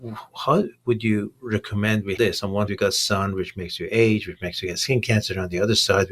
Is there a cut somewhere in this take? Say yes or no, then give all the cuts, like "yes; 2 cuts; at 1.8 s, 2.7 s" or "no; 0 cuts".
yes; 2 cuts; at 2.2 s, 2.7 s